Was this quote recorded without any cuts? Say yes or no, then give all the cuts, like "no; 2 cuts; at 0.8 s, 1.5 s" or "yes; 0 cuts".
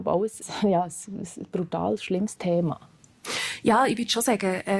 yes; 0 cuts